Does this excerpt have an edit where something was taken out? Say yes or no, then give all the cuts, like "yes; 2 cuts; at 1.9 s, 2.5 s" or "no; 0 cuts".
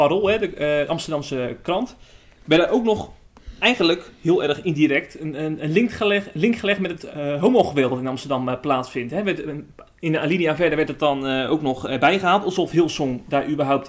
no; 0 cuts